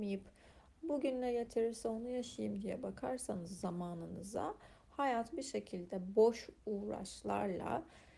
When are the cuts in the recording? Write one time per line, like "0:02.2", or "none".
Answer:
none